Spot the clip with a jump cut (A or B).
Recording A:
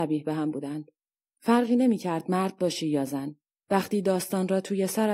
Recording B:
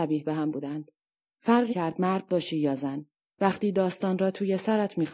B